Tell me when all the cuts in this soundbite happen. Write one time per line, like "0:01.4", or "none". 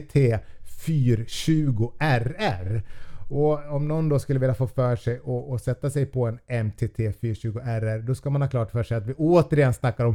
none

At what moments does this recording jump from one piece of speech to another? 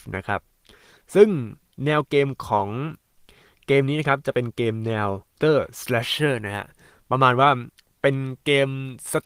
0:05.4

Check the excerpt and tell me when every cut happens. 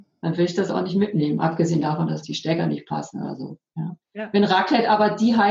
0:02.2
0:04.0

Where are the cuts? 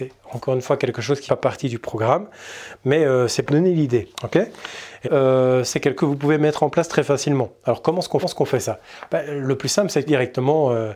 0:01.3
0:03.5
0:04.1
0:05.0
0:06.0
0:08.2
0:10.1

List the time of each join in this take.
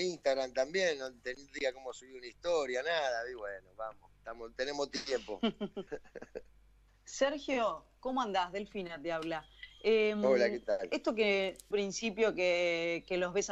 0:05.9
0:11.7

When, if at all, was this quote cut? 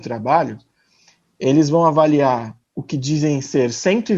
0:02.6

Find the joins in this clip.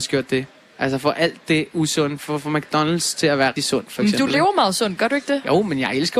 0:03.6

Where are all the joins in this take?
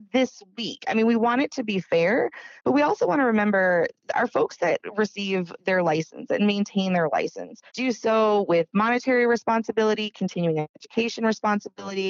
0:02.6
0:07.7
0:10.7

